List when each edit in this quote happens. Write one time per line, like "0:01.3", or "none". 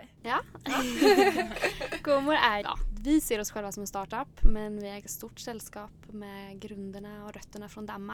0:02.6
0:05.0